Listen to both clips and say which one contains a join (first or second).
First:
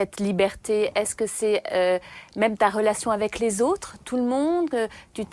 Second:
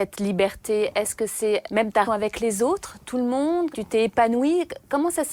second